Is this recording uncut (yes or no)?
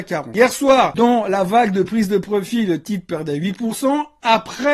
yes